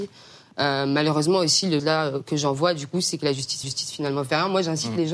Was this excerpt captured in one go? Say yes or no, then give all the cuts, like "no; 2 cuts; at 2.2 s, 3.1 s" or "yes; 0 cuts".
no; 2 cuts; at 1.8 s, 3.6 s